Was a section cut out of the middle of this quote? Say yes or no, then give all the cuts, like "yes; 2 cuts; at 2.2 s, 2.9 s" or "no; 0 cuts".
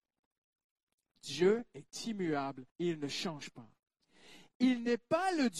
yes; 1 cut; at 2.7 s